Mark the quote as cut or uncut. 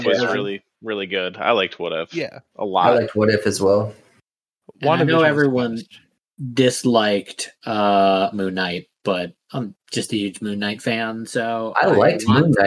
uncut